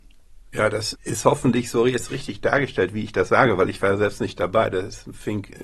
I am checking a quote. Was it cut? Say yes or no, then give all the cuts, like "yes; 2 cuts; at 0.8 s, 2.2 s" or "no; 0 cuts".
yes; 1 cut; at 0.9 s